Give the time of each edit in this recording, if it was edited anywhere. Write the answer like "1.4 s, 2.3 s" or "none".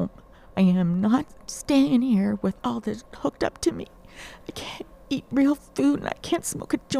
3.1 s